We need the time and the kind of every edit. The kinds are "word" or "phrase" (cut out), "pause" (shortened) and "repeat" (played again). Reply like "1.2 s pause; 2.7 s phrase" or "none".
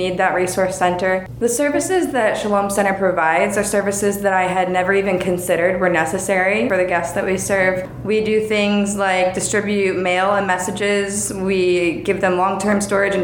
none